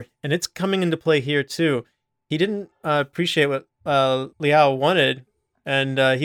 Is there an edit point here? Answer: yes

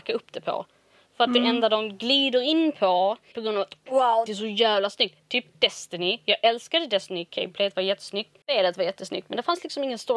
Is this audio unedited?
no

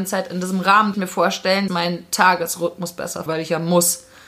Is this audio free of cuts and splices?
no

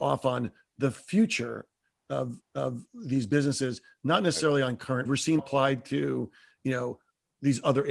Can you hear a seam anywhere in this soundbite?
yes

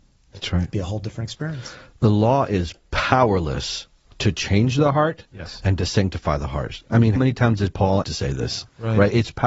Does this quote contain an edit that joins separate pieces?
yes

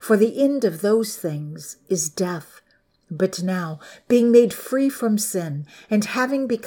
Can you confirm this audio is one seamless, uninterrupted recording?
yes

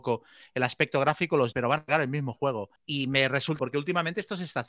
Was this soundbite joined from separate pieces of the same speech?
yes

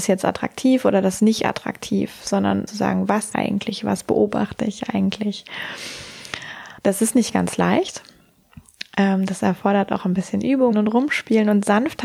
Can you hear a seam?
yes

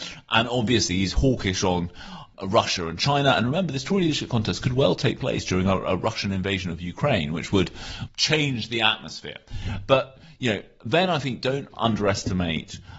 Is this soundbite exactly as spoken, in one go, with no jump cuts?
yes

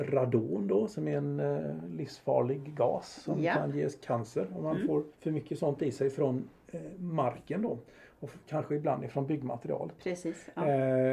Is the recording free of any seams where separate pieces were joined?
no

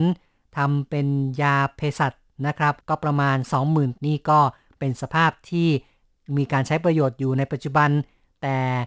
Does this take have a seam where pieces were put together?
yes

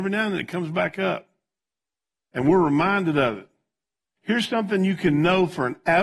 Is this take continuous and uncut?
yes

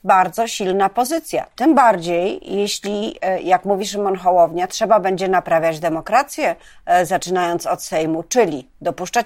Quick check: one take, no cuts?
yes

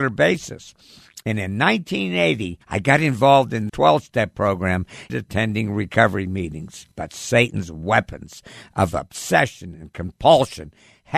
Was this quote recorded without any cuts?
no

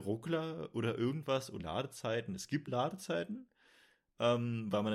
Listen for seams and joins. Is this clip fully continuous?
no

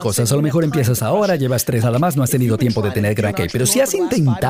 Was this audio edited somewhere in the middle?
yes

